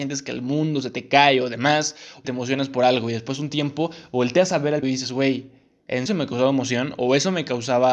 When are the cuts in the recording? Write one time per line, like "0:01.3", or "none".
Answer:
0:02.2
0:04.8
0:06.1